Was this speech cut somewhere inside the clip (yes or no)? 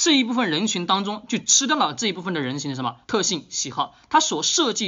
yes